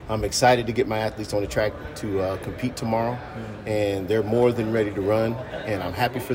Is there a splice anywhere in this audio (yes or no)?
no